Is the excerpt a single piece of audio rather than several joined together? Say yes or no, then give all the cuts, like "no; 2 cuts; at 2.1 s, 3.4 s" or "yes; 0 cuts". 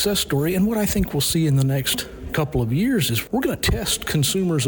yes; 0 cuts